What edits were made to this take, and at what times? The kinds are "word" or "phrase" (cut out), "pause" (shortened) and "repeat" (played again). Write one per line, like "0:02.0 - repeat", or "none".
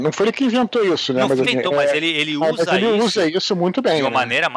0:01.4 - word